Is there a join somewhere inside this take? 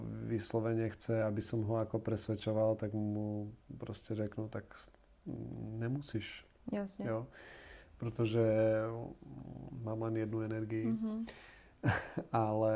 no; 0 cuts

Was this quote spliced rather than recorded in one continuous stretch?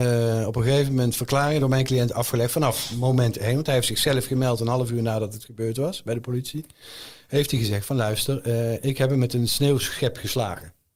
no; 0 cuts

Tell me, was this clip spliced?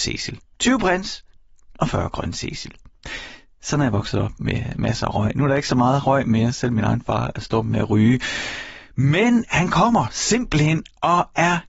no; 0 cuts

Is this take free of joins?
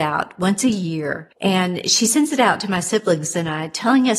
no; 1 cut; at 1.3 s

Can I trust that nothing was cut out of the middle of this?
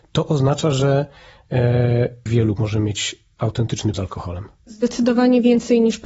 no; 3 cuts; at 2.3 s, 2.6 s, 3.9 s

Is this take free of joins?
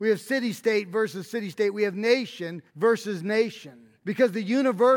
no; 2 cuts; at 2.7 s, 4.0 s

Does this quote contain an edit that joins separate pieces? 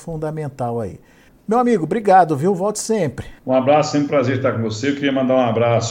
yes; 2 cuts; at 1.3 s, 3.4 s

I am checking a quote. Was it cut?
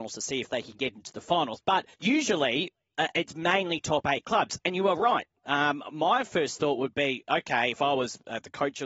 yes; 1 cut; at 1.9 s

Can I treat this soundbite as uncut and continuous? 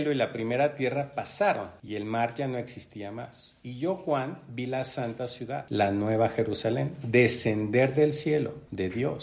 yes; 0 cuts

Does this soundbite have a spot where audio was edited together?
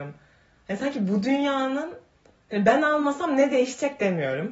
no; 0 cuts

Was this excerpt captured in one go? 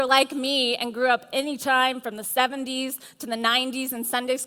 yes; 0 cuts

